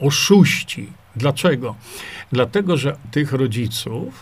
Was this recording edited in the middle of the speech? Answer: yes; 2 cuts; at 1.0 s, 3.0 s

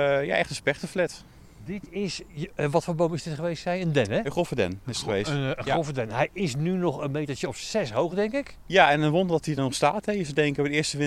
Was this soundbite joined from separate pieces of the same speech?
no; 0 cuts

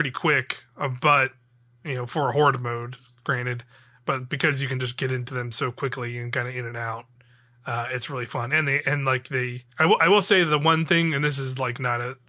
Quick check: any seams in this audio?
yes; 1 cut; at 9.7 s

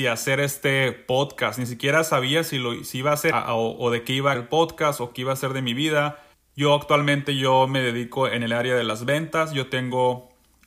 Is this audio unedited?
no; 3 cuts; at 3.3 s, 4.3 s, 6.3 s

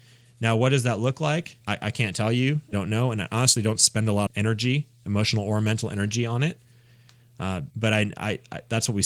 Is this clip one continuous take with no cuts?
no; 4 cuts; at 1.6 s, 2.7 s, 4.3 s, 7.7 s

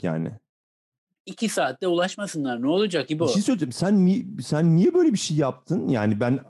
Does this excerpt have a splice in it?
no; 0 cuts

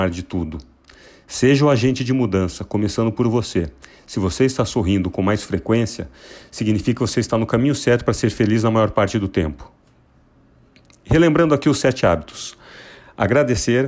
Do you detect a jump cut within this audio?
no; 0 cuts

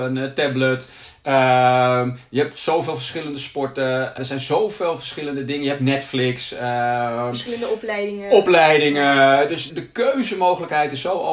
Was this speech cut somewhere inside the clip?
yes; 2 cuts; at 4.2 s, 9.7 s

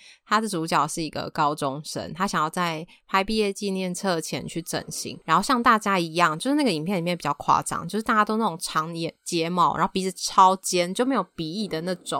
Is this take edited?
yes; 1 cut; at 5.2 s

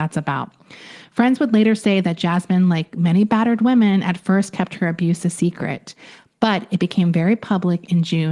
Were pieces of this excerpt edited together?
no; 0 cuts

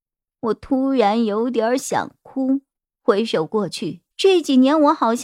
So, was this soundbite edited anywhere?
yes; 2 cuts; at 2.8 s, 4.1 s

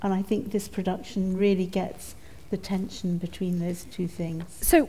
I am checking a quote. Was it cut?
no; 0 cuts

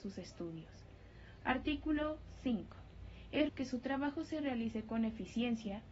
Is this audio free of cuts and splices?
no; 1 cut; at 3.5 s

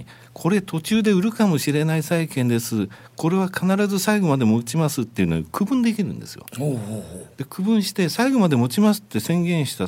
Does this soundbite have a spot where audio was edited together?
no; 0 cuts

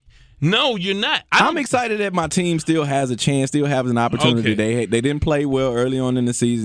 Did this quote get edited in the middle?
no; 0 cuts

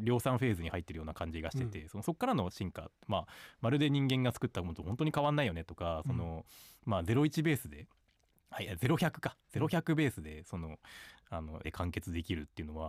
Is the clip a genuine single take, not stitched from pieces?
no; 1 cut; at 11.6 s

